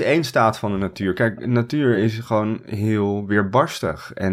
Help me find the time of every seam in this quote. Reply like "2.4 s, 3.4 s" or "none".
none